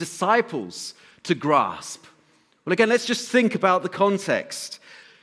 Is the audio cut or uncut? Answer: uncut